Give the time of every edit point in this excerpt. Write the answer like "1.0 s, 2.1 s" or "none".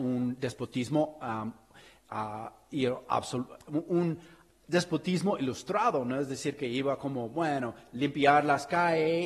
none